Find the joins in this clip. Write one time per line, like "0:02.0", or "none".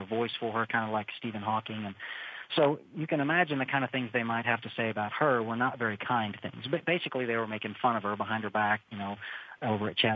0:02.9